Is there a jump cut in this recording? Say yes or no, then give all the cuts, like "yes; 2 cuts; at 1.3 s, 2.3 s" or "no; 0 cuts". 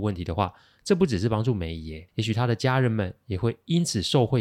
yes; 1 cut; at 2.1 s